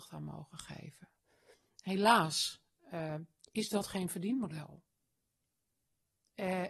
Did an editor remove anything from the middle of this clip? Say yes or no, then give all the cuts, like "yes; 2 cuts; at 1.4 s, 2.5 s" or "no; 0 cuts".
no; 0 cuts